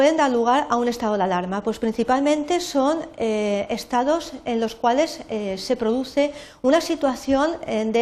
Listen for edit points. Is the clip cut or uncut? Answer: uncut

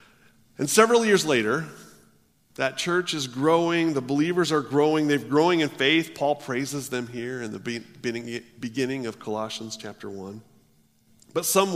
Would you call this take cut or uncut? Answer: uncut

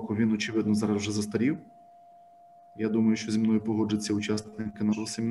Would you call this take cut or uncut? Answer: uncut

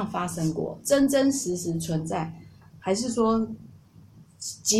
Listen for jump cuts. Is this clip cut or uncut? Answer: uncut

